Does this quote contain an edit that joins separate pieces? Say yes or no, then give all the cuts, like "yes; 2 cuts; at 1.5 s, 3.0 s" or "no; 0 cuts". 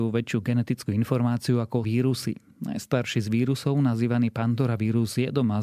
yes; 1 cut; at 1.8 s